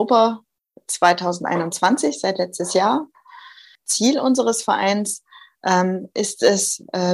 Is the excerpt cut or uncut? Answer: uncut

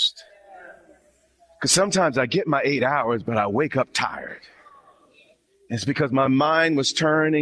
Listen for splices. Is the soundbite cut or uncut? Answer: uncut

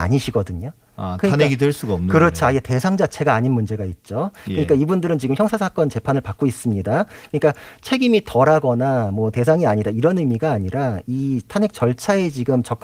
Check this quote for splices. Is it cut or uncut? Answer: uncut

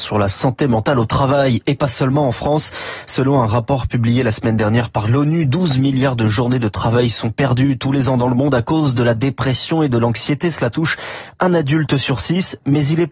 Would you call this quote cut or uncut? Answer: uncut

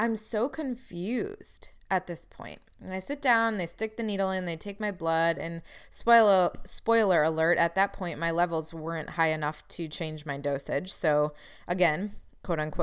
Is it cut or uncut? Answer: uncut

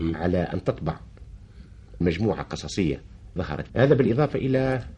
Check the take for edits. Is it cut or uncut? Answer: cut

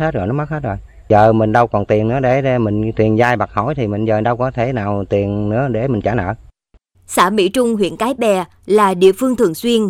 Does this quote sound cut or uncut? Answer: uncut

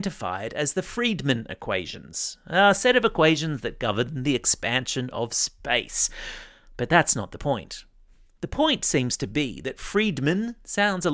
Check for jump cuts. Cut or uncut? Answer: uncut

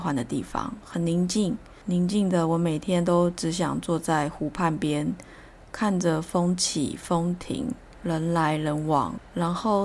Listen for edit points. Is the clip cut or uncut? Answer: uncut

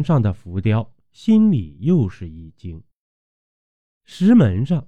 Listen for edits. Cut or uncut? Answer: uncut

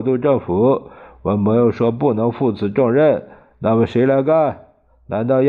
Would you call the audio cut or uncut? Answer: uncut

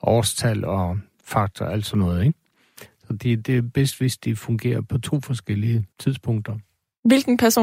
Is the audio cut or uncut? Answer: cut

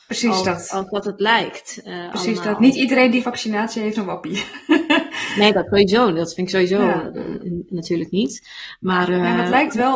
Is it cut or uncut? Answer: cut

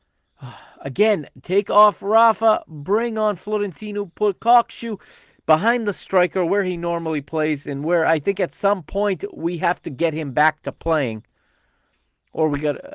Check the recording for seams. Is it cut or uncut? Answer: uncut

